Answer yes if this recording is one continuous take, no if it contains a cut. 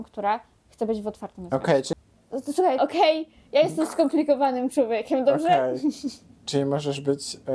no